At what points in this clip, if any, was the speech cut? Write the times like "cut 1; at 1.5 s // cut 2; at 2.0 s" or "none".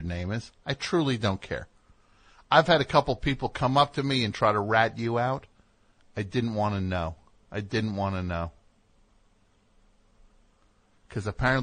none